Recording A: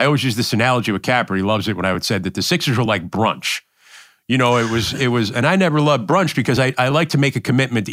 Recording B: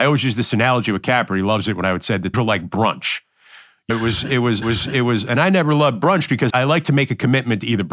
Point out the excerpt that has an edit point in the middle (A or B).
B